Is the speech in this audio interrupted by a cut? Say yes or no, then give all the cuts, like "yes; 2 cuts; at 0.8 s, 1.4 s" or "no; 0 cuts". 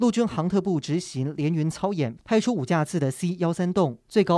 no; 0 cuts